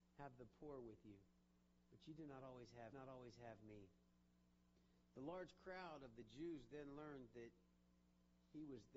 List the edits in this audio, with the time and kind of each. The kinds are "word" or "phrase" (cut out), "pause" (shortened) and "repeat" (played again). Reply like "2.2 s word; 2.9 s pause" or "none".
2.9 s repeat